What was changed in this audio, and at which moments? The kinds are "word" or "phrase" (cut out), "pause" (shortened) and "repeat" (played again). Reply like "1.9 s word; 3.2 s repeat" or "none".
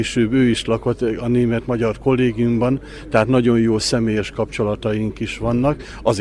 none